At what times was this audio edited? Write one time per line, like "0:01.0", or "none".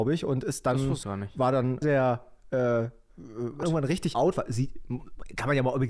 0:01.0
0:01.8
0:03.6
0:04.1